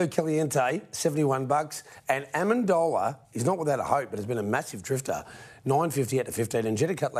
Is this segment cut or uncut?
uncut